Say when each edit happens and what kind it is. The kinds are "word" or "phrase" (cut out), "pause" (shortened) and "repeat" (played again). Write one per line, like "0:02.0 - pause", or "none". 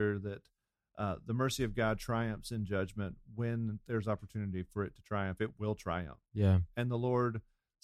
0:06.3 - pause